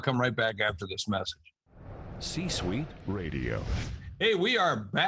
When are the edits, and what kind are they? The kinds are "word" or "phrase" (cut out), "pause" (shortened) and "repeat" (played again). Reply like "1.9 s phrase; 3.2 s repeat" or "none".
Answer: none